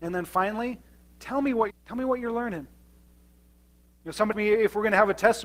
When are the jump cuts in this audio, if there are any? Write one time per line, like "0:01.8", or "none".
0:01.7
0:04.3